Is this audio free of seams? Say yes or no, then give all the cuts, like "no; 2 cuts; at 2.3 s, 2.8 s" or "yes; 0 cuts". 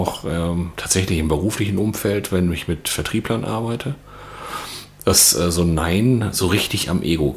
yes; 0 cuts